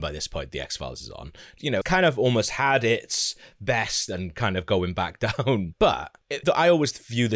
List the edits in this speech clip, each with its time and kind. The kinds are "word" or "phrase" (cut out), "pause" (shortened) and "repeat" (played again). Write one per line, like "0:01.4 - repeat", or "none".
0:01.8 - word
0:04.1 - word
0:06.4 - word

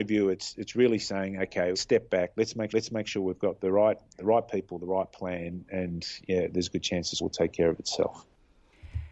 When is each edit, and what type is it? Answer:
0:01.7 - phrase
0:02.7 - repeat
0:07.2 - word

